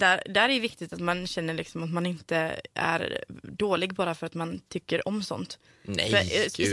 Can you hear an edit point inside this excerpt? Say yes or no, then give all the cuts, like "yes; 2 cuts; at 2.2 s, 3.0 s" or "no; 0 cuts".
no; 0 cuts